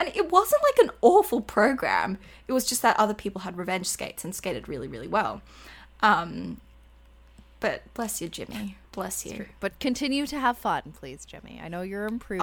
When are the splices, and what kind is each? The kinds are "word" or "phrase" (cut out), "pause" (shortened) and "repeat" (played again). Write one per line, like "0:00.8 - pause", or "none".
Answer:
0:08.8 - pause